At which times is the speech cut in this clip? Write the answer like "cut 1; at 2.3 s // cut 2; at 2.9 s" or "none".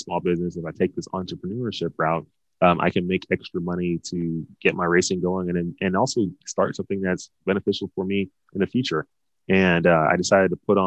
none